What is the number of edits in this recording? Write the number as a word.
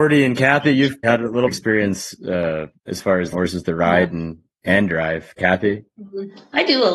four